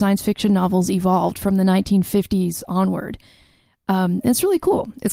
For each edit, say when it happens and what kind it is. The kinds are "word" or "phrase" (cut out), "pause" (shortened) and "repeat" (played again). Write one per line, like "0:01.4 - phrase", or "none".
none